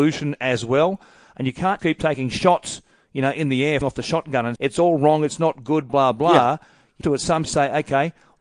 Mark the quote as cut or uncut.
cut